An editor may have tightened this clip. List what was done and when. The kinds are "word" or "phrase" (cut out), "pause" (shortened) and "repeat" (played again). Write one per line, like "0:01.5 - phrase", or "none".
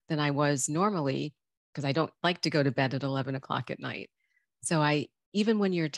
0:02.1 - pause